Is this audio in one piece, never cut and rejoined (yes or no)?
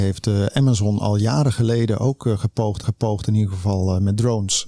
no